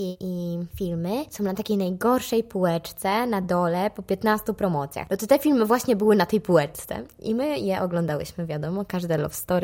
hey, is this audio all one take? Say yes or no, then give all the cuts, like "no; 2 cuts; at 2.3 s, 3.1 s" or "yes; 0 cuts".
yes; 0 cuts